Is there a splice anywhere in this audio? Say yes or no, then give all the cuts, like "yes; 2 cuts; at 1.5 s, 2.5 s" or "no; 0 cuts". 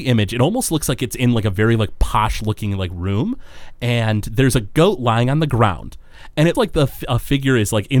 yes; 1 cut; at 6.5 s